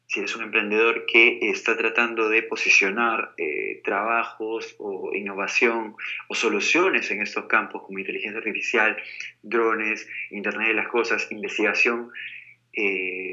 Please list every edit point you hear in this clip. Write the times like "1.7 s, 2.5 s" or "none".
none